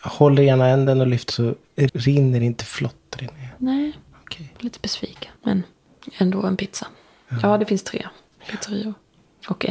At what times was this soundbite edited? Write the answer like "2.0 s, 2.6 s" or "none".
1.3 s, 1.9 s, 4.5 s, 5.4 s